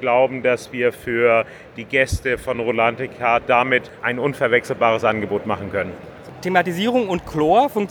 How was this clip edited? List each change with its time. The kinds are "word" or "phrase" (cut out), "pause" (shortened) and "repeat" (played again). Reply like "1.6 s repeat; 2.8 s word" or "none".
none